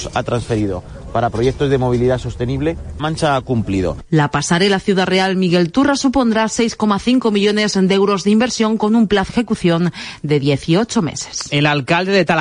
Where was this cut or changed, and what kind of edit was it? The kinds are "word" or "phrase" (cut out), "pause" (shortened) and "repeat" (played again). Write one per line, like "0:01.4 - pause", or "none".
0:03.0 - word
0:09.3 - word